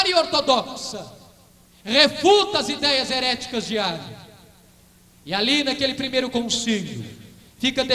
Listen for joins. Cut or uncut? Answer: uncut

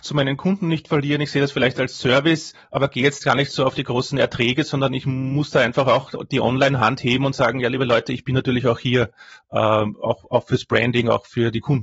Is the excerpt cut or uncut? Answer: uncut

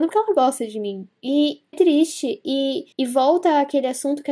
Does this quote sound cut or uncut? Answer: cut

